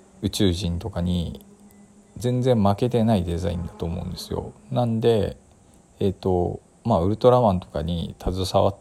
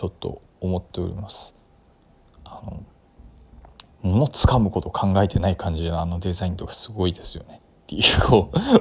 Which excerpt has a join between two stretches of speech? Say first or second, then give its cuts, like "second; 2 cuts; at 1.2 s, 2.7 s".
second; 1 cut; at 3.9 s